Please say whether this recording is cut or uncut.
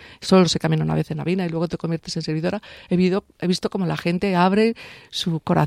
uncut